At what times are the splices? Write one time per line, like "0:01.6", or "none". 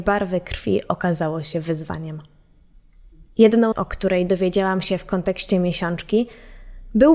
0:03.7